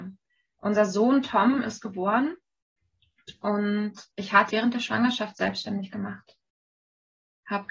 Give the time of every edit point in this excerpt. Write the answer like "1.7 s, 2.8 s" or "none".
4.1 s, 4.5 s